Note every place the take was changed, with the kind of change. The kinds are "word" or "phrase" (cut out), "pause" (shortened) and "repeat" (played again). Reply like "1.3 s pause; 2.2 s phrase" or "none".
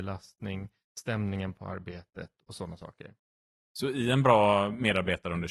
3.5 s pause